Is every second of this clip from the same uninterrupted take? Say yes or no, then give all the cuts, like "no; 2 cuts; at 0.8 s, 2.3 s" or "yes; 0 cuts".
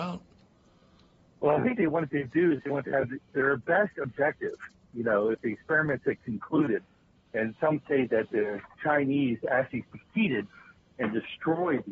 yes; 0 cuts